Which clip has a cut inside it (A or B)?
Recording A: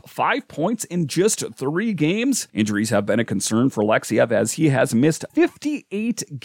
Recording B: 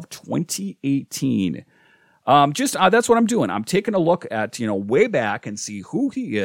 A